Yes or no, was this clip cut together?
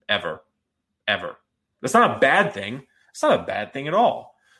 no